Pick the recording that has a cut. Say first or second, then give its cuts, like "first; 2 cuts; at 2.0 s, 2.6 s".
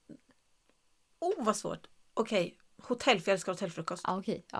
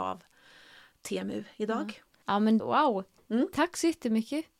second; 2 cuts; at 2.2 s, 2.6 s